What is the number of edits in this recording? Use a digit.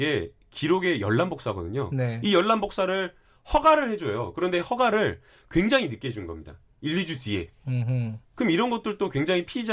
0